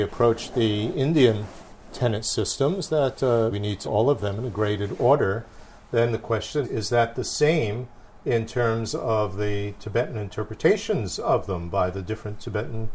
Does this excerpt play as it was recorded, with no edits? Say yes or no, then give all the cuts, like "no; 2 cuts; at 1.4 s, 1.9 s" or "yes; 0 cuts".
no; 3 cuts; at 3.5 s, 3.8 s, 6.6 s